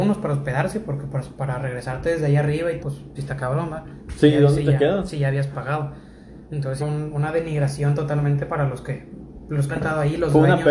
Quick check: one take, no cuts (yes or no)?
no